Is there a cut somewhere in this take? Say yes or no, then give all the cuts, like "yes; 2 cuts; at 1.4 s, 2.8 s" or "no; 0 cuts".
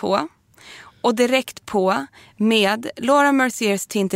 no; 0 cuts